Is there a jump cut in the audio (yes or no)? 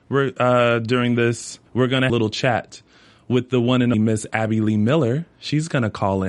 yes